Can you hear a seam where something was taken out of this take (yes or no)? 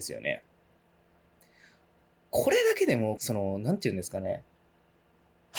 yes